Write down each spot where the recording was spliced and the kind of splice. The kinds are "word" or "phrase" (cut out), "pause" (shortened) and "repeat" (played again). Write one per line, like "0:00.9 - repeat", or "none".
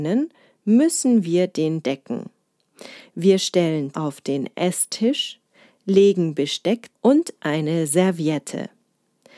0:01.8 - word
0:03.9 - word
0:06.9 - word